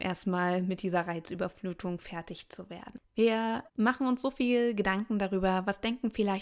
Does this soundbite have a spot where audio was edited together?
yes; 1 cut; at 3.7 s

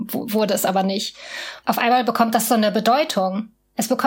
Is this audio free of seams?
yes; 0 cuts

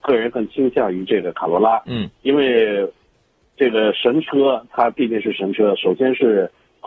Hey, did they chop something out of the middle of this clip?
no; 0 cuts

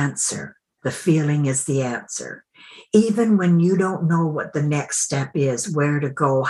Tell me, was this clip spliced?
no; 0 cuts

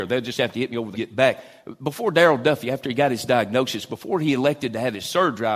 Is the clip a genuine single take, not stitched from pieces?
no; 1 cut; at 0.9 s

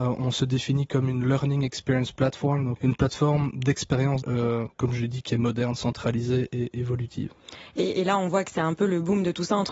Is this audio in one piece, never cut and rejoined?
no; 2 cuts; at 2.8 s, 4.2 s

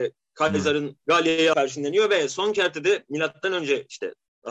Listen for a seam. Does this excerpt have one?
yes; 1 cut; at 1.5 s

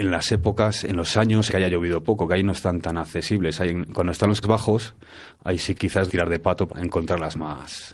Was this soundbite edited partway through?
yes; 5 cuts; at 1.5 s, 4.4 s, 5.7 s, 6.1 s, 6.7 s

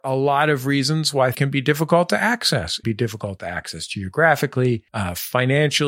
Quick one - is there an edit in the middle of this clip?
yes; 3 cuts; at 1.3 s, 2.8 s, 4.9 s

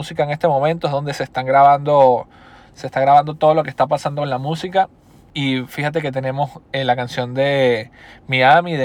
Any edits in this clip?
no; 0 cuts

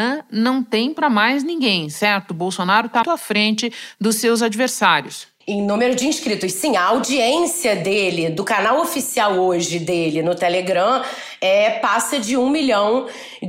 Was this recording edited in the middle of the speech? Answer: yes; 2 cuts; at 3.0 s, 5.4 s

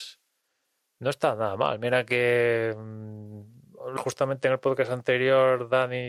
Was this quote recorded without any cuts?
no; 1 cut; at 4.0 s

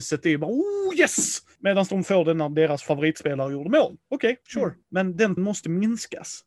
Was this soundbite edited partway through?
yes; 1 cut; at 5.4 s

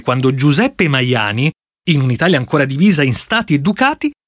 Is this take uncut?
yes; 0 cuts

